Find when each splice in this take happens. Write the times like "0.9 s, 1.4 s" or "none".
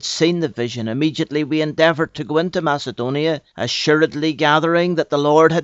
3.5 s